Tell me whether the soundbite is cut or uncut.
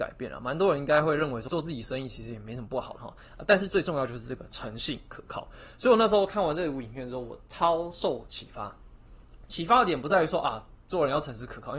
cut